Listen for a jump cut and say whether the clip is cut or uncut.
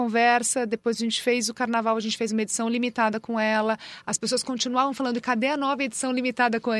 uncut